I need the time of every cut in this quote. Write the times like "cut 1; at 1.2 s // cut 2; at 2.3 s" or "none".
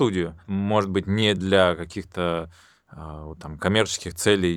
none